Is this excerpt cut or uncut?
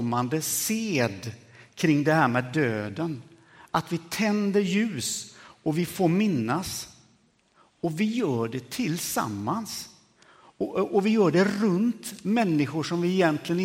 uncut